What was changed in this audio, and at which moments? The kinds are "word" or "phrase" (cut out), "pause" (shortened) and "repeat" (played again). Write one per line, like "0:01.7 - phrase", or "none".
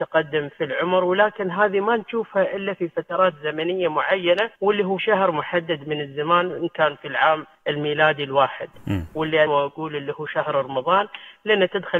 0:04.5 - pause
0:05.0 - word
0:07.5 - pause
0:09.5 - phrase